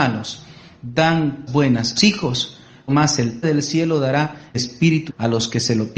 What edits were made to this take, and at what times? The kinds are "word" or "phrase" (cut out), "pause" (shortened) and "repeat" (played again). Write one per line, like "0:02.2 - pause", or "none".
0:01.5 - word
0:02.0 - word
0:02.9 - word
0:03.4 - word
0:04.5 - word
0:05.1 - word

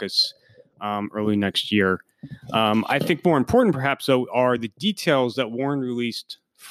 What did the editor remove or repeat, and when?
none

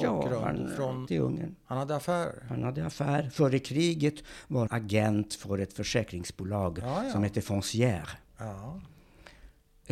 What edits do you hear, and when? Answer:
0:01.1 - word
0:04.7 - word

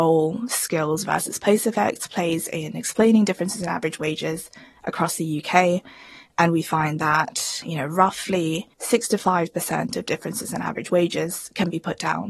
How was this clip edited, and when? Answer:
0:08.7 - pause

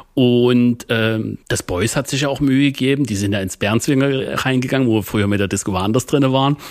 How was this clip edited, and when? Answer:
0:01.4 - pause

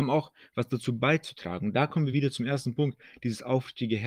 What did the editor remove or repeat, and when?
none

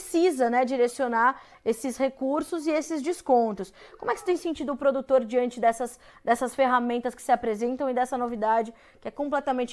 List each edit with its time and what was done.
none

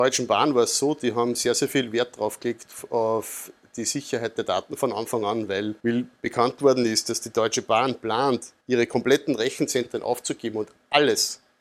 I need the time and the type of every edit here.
0:05.8 - pause
0:08.6 - pause

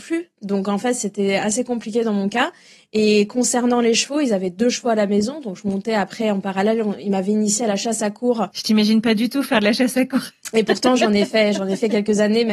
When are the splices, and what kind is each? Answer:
none

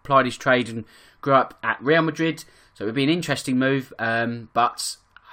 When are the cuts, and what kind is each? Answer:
none

